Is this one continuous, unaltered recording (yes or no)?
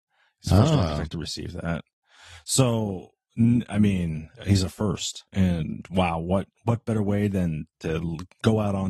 no